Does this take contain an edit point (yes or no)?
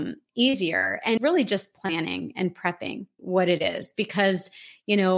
yes